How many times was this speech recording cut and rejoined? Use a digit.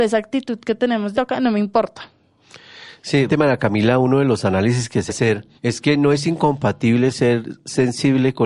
4